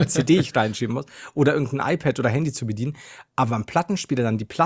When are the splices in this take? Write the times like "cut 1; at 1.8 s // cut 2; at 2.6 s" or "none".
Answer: none